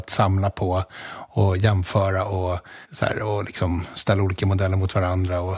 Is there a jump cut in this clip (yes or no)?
yes